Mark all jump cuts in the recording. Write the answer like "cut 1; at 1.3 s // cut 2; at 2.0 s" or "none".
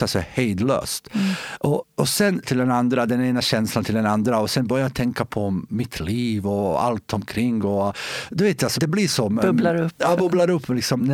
cut 1; at 2.4 s // cut 2; at 8.8 s